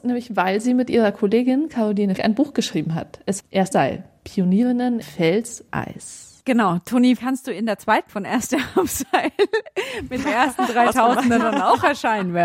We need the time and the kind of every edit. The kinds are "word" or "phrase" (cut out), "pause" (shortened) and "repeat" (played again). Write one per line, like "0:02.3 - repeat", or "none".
0:02.2 - word
0:03.4 - word
0:03.7 - word
0:05.0 - word
0:05.7 - word
0:07.2 - word
0:08.1 - word
0:10.2 - word